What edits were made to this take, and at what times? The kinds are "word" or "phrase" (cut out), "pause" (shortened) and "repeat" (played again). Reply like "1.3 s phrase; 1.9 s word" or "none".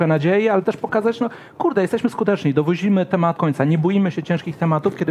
3.4 s word